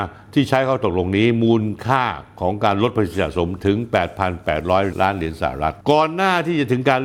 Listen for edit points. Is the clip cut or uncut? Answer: cut